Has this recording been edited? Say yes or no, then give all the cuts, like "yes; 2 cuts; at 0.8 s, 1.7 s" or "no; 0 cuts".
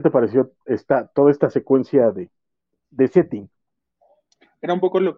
no; 0 cuts